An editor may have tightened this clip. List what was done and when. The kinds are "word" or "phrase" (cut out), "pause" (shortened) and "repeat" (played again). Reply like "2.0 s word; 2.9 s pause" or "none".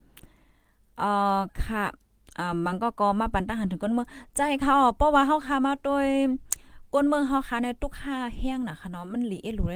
none